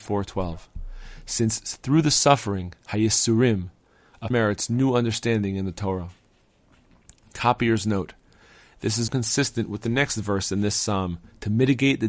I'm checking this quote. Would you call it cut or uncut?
cut